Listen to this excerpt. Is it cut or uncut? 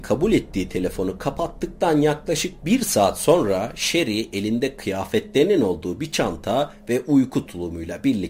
uncut